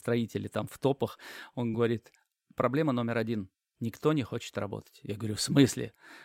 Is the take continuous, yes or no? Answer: yes